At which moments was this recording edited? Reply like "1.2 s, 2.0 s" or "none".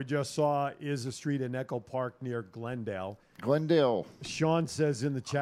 none